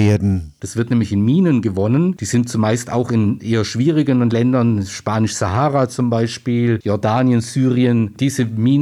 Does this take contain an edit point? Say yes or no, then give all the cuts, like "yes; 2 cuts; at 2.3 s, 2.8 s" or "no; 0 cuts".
no; 0 cuts